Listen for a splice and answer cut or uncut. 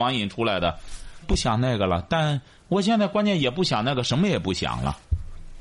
cut